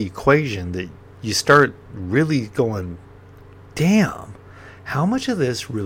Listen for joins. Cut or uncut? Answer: uncut